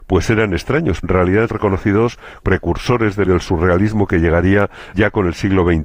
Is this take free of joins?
no; 5 cuts; at 1.0 s, 1.5 s, 2.4 s, 3.3 s, 4.9 s

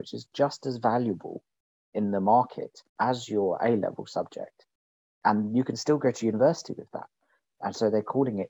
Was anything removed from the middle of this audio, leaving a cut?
yes; 1 cut; at 2.9 s

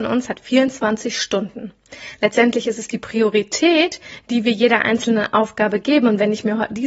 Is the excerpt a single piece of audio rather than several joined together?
yes; 0 cuts

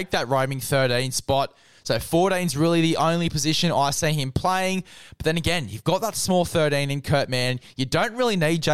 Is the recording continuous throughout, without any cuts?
yes; 0 cuts

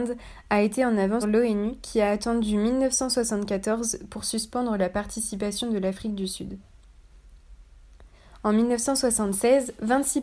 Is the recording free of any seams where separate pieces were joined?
no; 1 cut; at 1.2 s

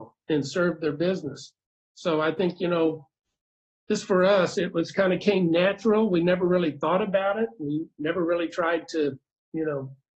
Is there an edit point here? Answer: no; 0 cuts

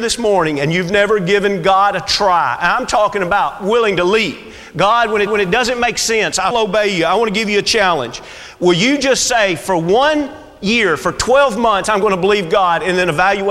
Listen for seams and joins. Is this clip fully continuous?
no; 2 cuts; at 5.3 s, 6.5 s

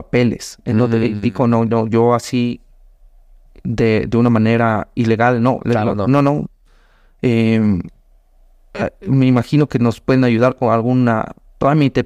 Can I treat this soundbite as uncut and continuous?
yes; 0 cuts

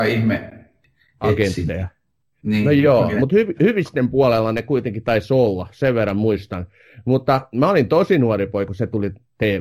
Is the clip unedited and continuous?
no; 1 cut; at 8.7 s

